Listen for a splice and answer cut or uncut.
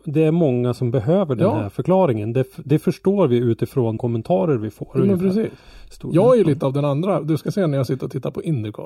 cut